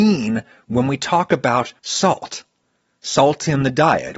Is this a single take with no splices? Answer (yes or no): no